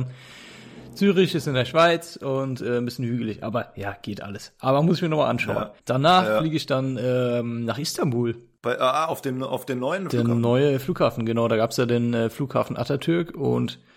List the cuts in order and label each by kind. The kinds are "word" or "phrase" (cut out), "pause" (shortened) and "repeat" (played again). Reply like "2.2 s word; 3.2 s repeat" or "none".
5.8 s pause